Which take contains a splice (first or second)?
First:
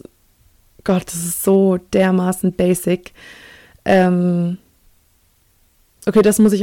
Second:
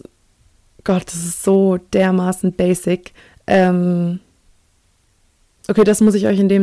second